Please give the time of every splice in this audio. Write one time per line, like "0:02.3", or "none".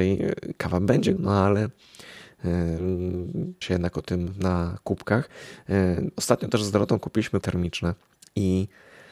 0:01.2
0:03.6
0:07.4